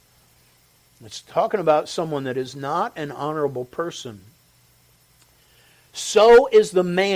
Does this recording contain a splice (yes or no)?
no